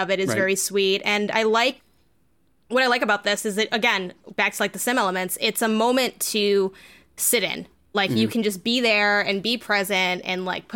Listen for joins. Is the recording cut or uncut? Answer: uncut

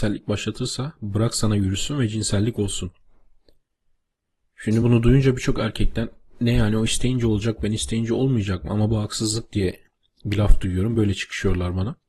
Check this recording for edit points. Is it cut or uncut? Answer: uncut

